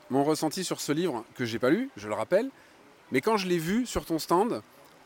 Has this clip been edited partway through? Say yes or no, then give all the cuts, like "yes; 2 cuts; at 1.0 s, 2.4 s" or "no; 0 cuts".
no; 0 cuts